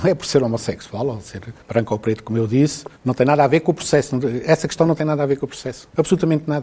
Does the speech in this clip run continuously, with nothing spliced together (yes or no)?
no